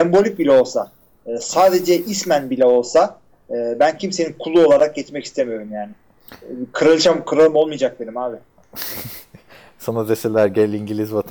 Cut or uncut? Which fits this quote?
uncut